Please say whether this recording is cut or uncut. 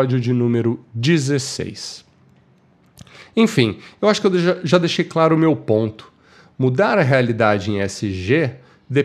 uncut